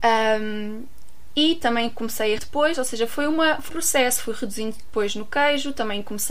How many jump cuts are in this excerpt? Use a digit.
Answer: 2